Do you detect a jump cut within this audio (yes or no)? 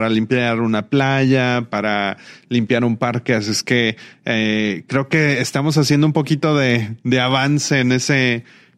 no